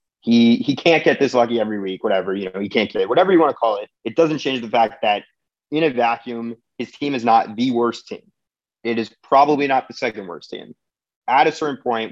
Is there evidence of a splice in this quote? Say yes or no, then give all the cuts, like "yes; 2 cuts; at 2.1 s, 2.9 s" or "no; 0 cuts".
yes; 2 cuts; at 2.9 s, 3.9 s